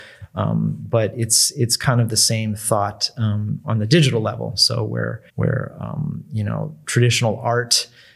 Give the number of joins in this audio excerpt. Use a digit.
1